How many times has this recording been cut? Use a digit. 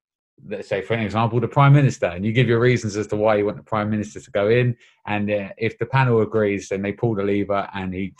0